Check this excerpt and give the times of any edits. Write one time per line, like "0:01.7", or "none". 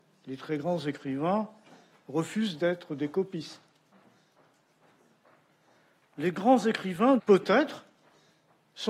0:07.2